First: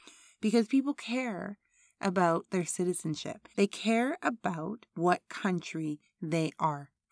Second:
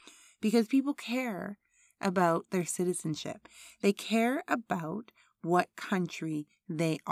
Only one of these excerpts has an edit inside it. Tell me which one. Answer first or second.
first